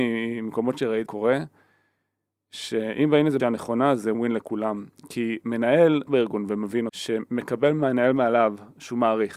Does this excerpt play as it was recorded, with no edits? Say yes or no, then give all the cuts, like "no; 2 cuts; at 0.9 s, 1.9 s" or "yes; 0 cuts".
no; 5 cuts; at 1.1 s, 3.4 s, 4.1 s, 6.1 s, 6.9 s